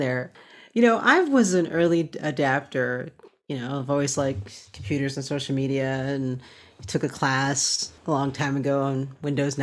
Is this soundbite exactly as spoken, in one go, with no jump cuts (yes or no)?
no